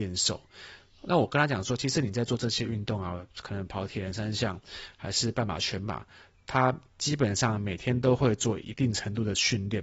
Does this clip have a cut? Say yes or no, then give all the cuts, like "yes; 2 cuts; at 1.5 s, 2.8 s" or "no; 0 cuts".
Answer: no; 0 cuts